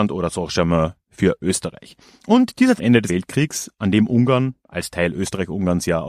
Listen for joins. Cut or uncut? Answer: cut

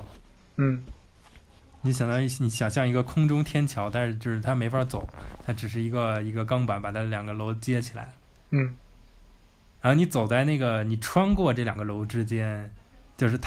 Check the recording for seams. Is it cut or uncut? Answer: uncut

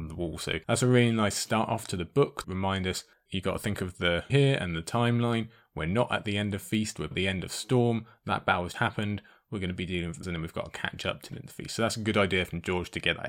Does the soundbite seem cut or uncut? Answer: cut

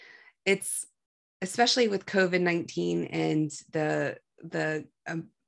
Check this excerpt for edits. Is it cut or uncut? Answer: uncut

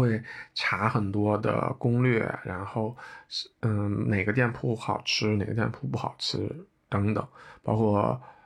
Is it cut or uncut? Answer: uncut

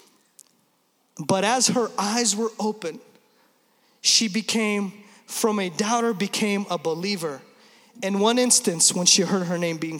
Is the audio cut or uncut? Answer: uncut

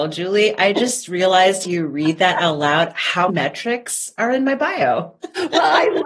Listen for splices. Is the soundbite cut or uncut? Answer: cut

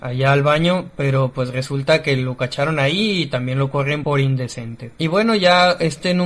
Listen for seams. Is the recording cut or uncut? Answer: uncut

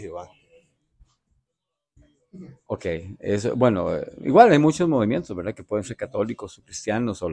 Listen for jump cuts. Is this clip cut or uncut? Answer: uncut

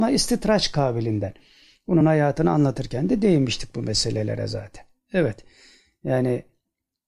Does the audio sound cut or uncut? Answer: uncut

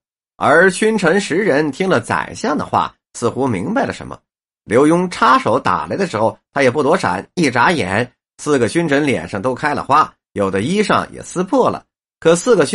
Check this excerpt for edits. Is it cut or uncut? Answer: uncut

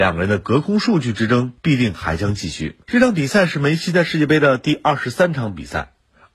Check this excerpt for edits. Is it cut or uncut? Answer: cut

